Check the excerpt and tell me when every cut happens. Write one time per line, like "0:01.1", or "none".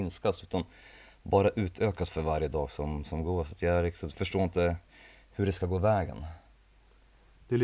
none